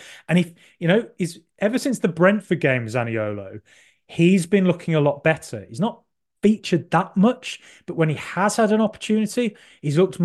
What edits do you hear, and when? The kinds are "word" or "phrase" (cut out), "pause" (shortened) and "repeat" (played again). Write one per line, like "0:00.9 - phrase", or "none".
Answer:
none